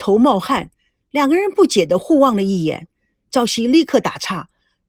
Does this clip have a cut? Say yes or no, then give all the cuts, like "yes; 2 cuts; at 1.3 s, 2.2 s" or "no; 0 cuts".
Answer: no; 0 cuts